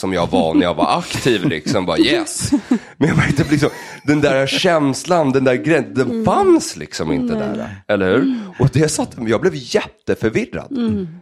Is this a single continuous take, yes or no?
yes